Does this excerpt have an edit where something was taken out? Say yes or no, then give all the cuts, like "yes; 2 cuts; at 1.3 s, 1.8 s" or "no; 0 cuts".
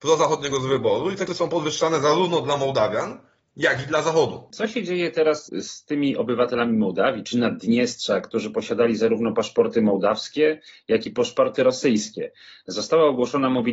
yes; 1 cut; at 1.3 s